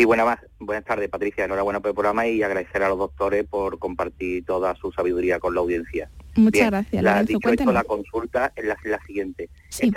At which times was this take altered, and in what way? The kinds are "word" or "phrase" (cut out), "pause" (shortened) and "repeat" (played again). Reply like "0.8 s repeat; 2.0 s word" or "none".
8.8 s repeat